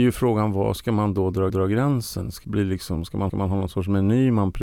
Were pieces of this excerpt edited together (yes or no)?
yes